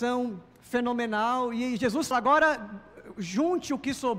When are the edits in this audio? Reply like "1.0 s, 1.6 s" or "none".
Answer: 2.1 s